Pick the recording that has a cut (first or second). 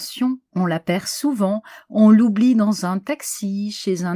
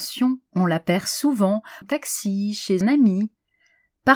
second